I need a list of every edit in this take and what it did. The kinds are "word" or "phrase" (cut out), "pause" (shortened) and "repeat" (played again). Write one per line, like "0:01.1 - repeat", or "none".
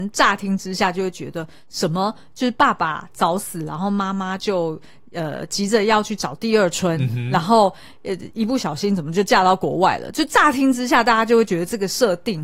none